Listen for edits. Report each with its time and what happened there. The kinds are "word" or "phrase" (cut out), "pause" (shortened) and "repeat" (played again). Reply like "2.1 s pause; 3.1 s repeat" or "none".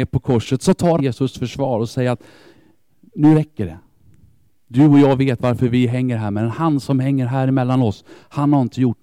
1.0 s word